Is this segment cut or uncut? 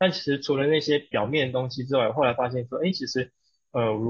uncut